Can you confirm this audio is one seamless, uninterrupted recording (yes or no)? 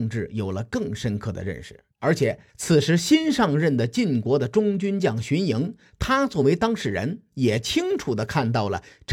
no